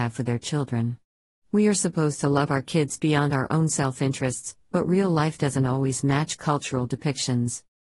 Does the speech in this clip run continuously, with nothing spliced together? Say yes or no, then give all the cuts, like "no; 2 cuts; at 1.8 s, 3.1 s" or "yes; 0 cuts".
yes; 0 cuts